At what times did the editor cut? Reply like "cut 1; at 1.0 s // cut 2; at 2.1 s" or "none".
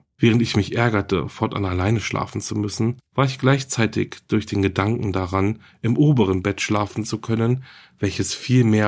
none